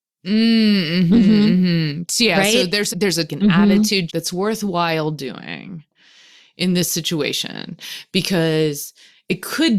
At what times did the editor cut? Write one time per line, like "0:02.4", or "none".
0:02.9
0:03.3
0:04.1